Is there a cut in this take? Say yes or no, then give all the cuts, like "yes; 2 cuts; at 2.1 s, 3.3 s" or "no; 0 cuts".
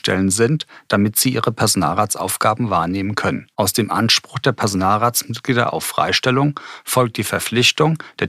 yes; 1 cut; at 3.5 s